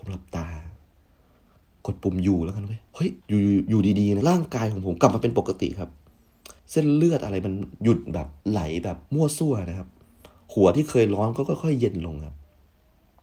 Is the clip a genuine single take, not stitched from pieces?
no; 6 cuts; at 2.9 s, 3.2 s, 4.2 s, 6.6 s, 8.4 s, 9.1 s

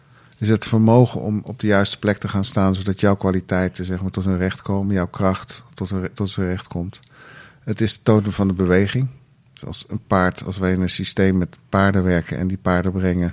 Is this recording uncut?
yes; 0 cuts

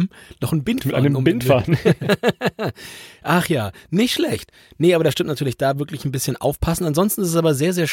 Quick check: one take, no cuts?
yes; 0 cuts

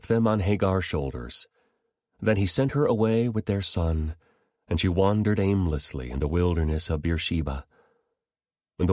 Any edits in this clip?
no; 0 cuts

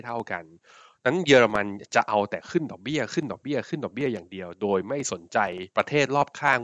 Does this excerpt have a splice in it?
yes; 1 cut; at 5.7 s

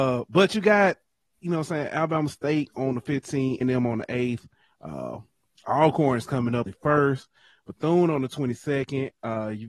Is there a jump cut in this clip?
yes; 2 cuts; at 3.6 s, 6.7 s

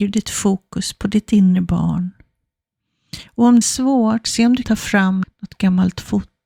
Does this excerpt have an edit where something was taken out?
yes; 3 cuts; at 3.6 s, 4.6 s, 5.2 s

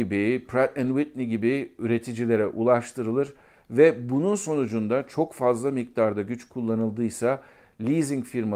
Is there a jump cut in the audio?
no; 0 cuts

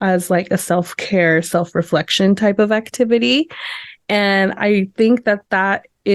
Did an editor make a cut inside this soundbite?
no; 0 cuts

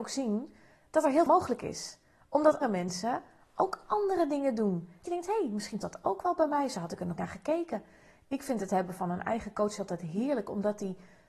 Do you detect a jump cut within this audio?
yes; 5 cuts; at 1.3 s, 2.6 s, 5.1 s, 5.8 s, 7.2 s

